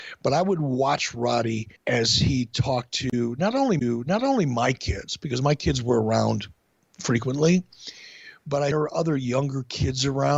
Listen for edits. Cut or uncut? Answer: cut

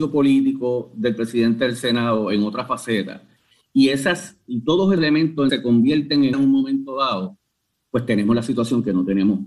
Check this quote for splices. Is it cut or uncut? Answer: cut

